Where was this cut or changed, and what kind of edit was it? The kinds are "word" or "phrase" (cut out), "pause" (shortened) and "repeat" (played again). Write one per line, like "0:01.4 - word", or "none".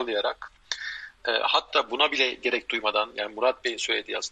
none